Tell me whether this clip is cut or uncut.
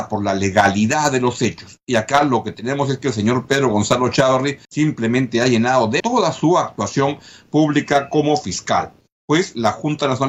cut